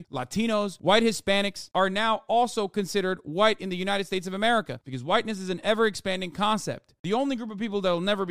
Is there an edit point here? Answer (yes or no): no